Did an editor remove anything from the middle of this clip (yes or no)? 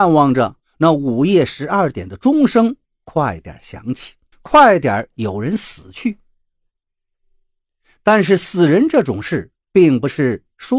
yes